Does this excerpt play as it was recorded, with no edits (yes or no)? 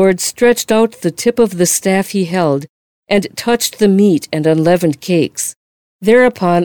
yes